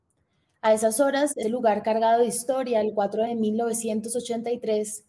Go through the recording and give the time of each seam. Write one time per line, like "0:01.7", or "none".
0:01.4
0:03.3